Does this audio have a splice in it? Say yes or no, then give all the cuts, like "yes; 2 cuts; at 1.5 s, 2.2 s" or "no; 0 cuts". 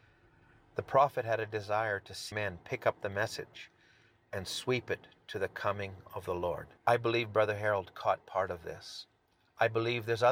yes; 2 cuts; at 2.3 s, 6.8 s